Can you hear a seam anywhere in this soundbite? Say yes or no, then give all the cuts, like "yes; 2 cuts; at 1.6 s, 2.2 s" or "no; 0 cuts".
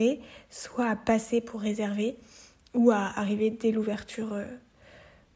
no; 0 cuts